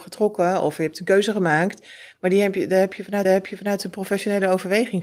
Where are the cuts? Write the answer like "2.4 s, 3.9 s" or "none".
3.2 s